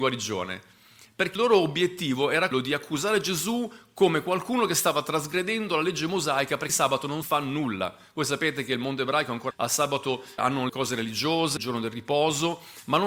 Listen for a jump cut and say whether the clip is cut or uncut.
cut